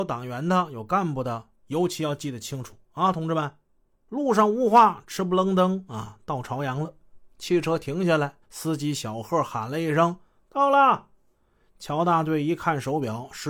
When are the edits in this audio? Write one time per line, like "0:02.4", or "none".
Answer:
0:08.4